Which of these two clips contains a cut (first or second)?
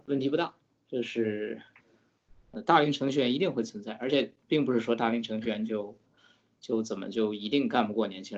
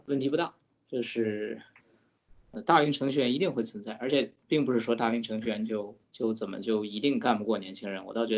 second